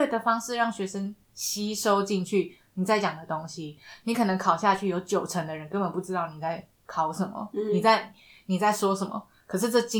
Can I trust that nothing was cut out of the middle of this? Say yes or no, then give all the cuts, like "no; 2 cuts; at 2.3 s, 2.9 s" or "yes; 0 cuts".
yes; 0 cuts